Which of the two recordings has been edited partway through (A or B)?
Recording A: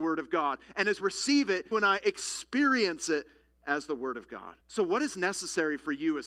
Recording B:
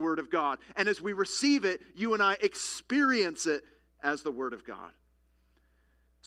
A